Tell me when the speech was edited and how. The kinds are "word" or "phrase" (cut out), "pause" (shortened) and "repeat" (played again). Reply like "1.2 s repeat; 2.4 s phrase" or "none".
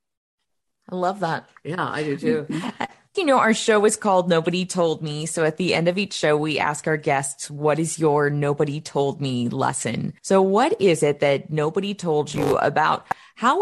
3.1 s word; 10.2 s pause